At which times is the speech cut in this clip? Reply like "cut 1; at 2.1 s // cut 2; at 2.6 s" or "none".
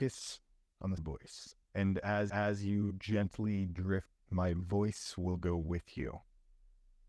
cut 1; at 1.0 s // cut 2; at 1.6 s // cut 3; at 2.3 s // cut 4; at 4.1 s